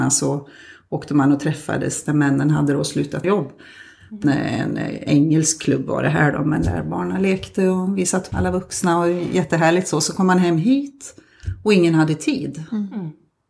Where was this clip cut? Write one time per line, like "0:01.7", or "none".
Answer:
0:03.2
0:04.2
0:08.3